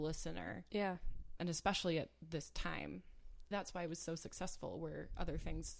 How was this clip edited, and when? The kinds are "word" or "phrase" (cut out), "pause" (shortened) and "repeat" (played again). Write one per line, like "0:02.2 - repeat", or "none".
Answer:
0:01.4 - word
0:03.5 - word